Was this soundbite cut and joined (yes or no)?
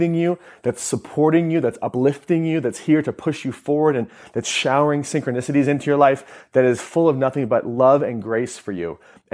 no